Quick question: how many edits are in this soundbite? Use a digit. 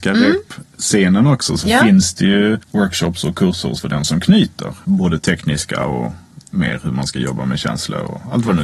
2